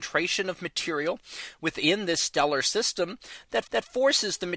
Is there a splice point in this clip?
yes; 1 cut; at 3.7 s

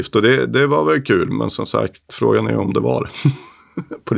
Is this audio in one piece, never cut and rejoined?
yes; 0 cuts

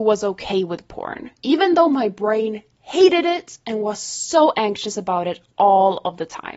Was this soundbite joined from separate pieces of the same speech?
no; 0 cuts

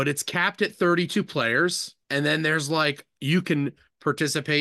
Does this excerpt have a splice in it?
yes; 1 cut; at 2.0 s

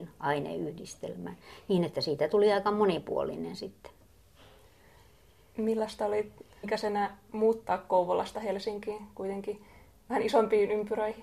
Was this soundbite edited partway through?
yes; 1 cut; at 6.6 s

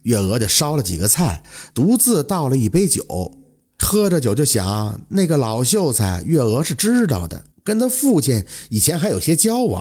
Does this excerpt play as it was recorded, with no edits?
no; 1 cut; at 7.5 s

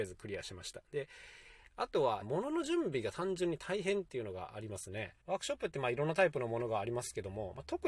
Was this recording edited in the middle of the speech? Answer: yes; 2 cuts; at 2.2 s, 5.2 s

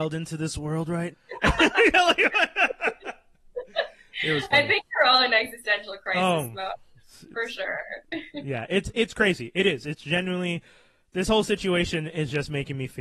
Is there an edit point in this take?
yes; 1 cut; at 1.1 s

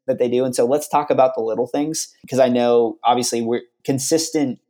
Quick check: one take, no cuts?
yes; 0 cuts

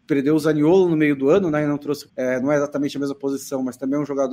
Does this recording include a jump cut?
yes; 1 cut; at 2.1 s

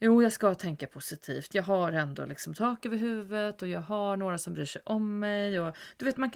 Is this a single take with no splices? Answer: yes; 0 cuts

